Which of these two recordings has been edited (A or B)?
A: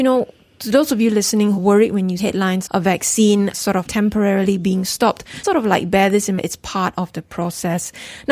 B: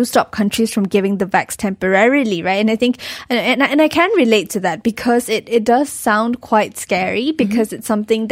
A